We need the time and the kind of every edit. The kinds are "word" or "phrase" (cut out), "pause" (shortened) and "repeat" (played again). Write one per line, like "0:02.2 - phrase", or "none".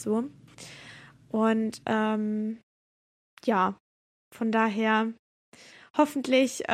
none

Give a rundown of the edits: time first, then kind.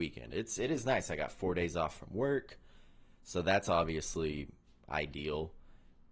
none

